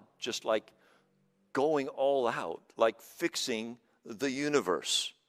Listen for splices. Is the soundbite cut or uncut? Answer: uncut